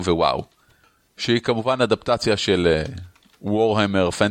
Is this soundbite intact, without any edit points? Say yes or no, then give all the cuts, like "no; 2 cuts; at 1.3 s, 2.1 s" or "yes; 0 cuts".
yes; 0 cuts